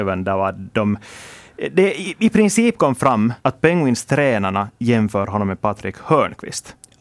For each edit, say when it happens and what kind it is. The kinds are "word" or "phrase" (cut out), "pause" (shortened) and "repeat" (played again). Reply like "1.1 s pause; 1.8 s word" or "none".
3.4 s pause